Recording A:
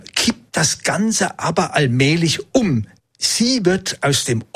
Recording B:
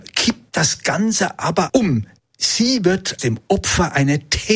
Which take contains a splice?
B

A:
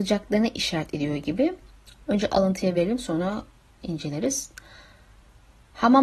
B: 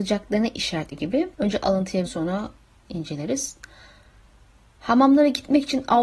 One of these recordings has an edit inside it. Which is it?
B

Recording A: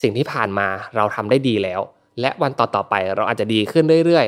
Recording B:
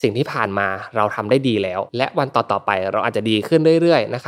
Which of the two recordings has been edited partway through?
B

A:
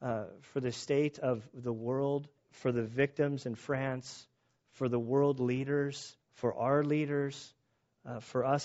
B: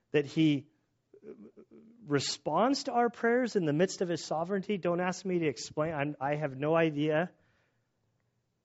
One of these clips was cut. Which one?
A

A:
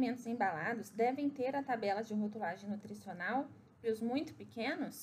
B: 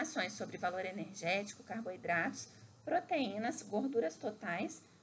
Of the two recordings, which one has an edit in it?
A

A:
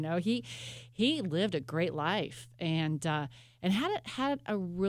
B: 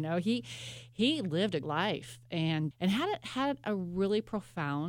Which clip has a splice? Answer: B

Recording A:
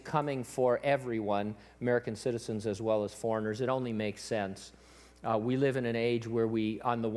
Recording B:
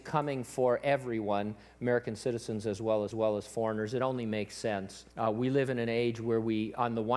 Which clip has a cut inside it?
B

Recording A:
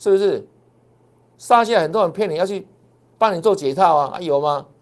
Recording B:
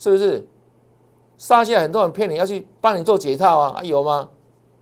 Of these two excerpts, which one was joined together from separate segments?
B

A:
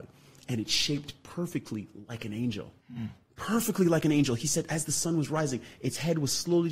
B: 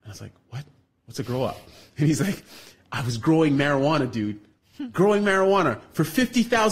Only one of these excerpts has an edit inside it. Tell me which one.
A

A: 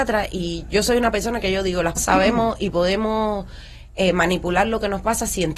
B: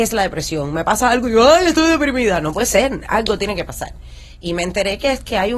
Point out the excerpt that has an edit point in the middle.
A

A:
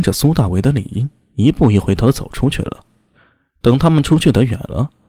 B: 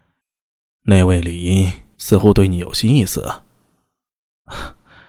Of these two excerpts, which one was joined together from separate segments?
B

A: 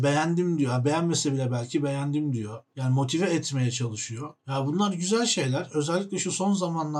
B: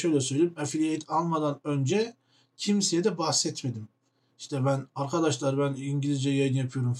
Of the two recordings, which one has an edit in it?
A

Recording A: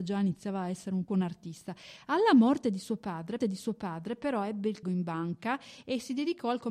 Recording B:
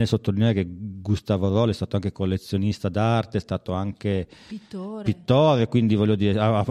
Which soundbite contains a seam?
A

